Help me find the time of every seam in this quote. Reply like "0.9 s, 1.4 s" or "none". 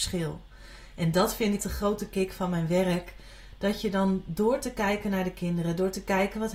1.6 s